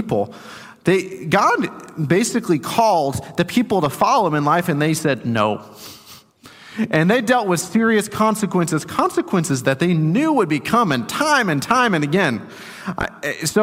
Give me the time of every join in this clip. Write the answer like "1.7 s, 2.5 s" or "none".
none